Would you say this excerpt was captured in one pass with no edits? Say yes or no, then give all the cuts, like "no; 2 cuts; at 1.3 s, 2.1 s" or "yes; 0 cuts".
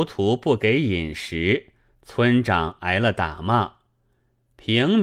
yes; 0 cuts